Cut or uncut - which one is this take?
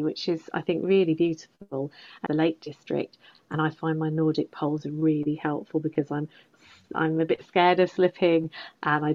cut